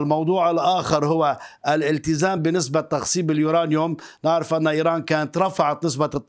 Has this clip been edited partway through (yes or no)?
no